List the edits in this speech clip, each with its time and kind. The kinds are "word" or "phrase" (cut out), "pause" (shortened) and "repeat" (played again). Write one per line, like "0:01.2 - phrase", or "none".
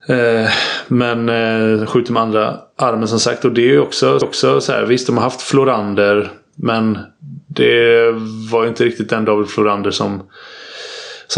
0:04.2 - repeat